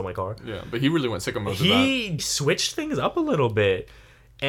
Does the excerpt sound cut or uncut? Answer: cut